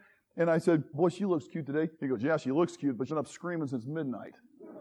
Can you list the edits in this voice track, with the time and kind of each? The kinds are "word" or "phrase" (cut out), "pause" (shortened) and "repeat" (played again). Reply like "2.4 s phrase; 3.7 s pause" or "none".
0.9 s word; 1.9 s pause; 3.1 s word